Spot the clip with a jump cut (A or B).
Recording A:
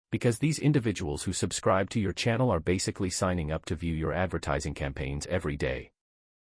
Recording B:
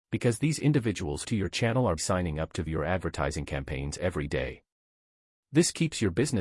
B